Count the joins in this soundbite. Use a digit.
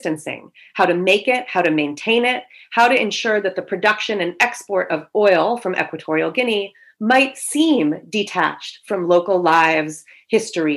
0